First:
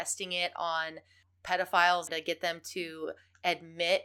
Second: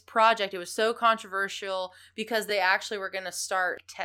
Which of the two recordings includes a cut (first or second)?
first